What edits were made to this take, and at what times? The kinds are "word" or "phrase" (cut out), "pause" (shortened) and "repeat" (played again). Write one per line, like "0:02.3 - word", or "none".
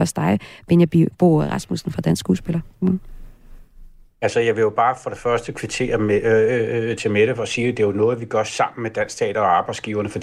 0:02.7 - pause